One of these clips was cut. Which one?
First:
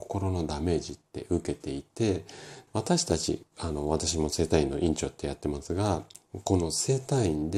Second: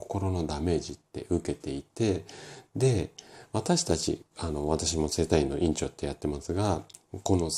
first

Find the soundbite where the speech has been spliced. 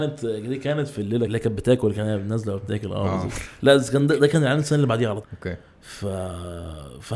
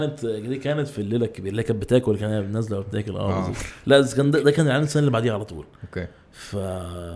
first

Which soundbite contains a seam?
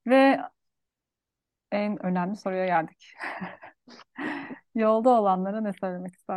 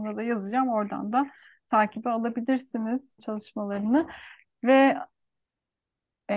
second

